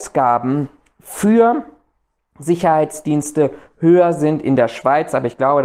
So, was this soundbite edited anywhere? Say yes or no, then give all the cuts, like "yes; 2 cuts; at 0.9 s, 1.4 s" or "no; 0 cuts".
no; 0 cuts